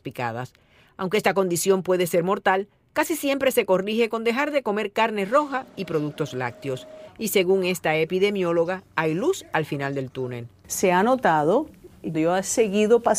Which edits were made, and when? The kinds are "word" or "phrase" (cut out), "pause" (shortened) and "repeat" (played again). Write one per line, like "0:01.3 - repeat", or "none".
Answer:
0:12.1 - word